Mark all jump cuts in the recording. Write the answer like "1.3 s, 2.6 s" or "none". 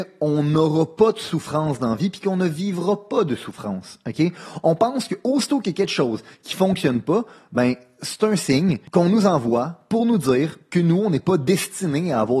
none

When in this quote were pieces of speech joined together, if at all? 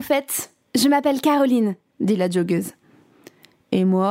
none

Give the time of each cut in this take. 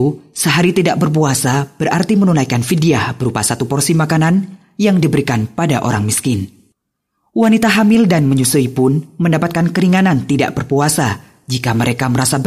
none

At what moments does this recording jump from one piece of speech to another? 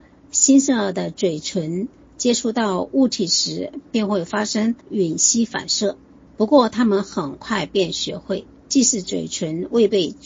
4.8 s, 6.3 s, 8.6 s

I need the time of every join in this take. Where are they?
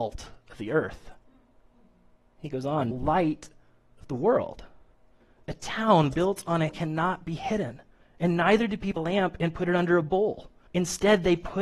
2.9 s, 6.7 s, 8.0 s, 9.0 s, 10.7 s

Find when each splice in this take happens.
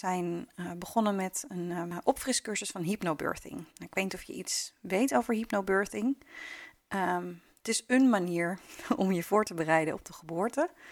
3.7 s, 7.5 s

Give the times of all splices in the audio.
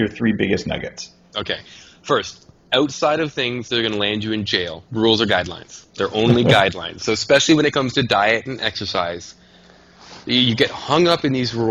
4.9 s, 5.9 s

